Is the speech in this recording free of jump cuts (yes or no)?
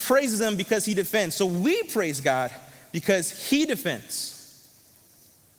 yes